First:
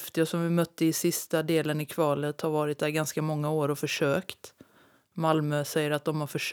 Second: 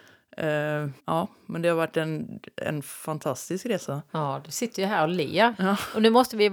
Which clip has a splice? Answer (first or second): second